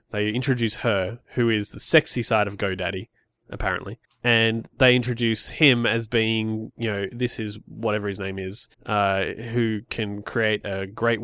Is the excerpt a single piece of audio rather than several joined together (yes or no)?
no